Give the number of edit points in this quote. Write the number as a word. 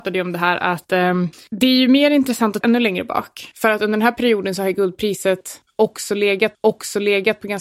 two